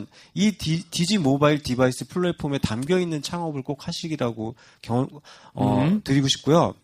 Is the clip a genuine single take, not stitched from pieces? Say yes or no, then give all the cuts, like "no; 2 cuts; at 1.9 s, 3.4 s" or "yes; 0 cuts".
yes; 0 cuts